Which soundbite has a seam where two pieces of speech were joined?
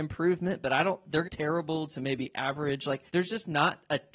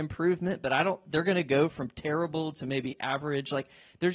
first; 2 cuts; at 1.2 s, 3.1 s

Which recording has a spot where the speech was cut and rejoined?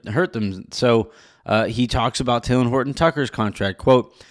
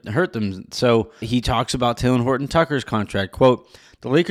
second; 1 cut; at 1.2 s

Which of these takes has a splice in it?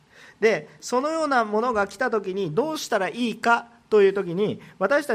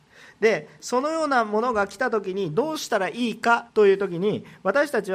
second; 1 cut; at 3.7 s

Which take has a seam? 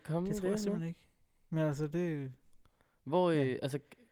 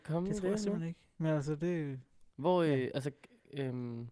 second; 2 cuts; at 1.1 s, 2.3 s

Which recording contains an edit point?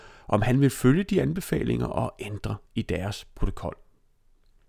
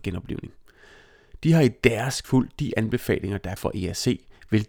second; 2 cuts; at 2.2 s, 3.6 s

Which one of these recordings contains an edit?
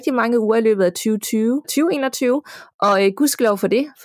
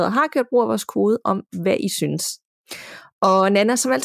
first; 1 cut; at 1.6 s

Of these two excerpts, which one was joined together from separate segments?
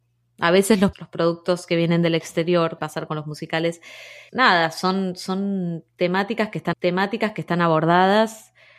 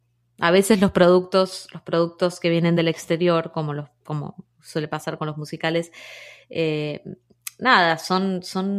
first; 4 cuts; at 0.9 s, 2.8 s, 4.3 s, 6.7 s

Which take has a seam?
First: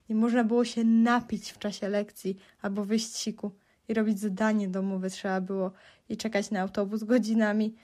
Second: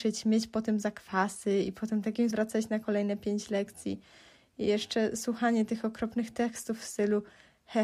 second; 1 cut; at 2.3 s

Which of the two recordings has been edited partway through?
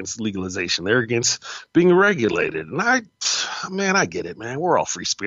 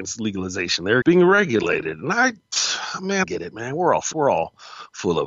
second; 3 cuts; at 1.0 s, 3.2 s, 4.1 s

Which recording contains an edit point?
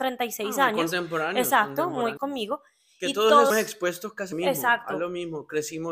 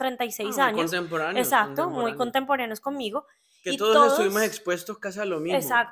first; 3 cuts; at 2.2 s, 3.5 s, 4.3 s

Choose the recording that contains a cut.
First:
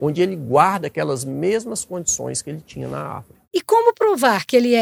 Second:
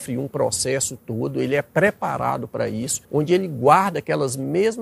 second; 1 cut; at 3.0 s

